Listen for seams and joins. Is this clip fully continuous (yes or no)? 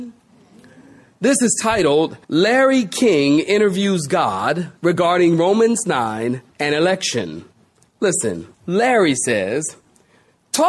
no